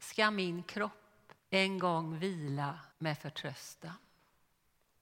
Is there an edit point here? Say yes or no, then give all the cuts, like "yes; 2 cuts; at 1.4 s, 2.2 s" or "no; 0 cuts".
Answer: yes; 2 cuts; at 1.4 s, 2.9 s